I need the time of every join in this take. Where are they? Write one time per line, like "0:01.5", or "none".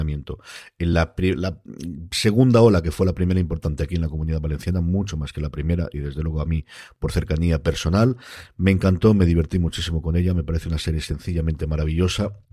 none